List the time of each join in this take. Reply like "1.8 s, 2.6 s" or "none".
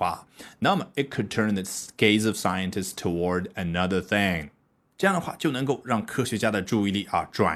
none